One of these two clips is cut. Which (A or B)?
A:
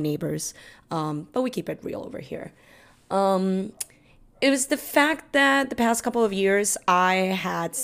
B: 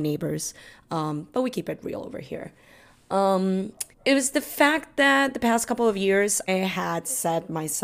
B